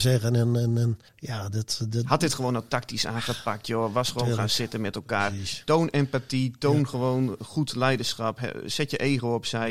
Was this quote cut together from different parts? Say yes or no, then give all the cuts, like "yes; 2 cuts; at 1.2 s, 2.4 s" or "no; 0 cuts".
yes; 1 cut; at 1.1 s